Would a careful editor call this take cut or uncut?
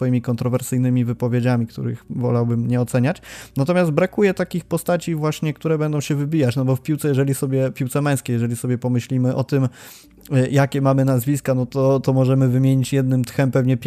uncut